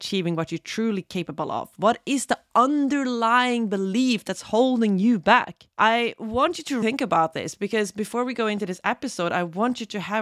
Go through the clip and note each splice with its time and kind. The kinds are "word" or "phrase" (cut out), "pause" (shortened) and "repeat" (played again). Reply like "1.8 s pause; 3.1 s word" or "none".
5.7 s pause; 6.8 s word